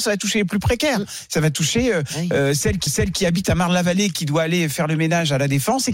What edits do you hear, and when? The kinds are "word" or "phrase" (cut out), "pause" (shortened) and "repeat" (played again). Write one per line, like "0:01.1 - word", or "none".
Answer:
0:02.9 - repeat